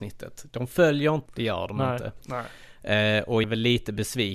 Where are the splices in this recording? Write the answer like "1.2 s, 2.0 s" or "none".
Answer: 1.3 s, 3.4 s